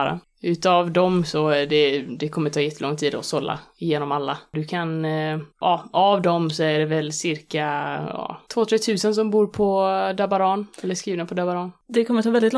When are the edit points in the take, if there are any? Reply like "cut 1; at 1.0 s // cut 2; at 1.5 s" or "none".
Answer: cut 1; at 5.5 s // cut 2; at 8.5 s // cut 3; at 10.7 s